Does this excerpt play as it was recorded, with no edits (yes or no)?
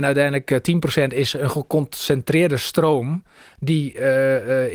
yes